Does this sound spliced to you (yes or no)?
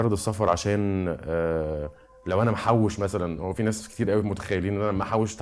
no